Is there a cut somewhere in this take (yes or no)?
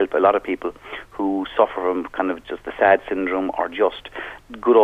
no